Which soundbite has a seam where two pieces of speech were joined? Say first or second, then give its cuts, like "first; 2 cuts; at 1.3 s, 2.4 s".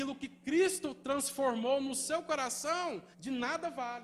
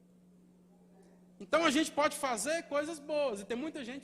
first; 1 cut; at 3.1 s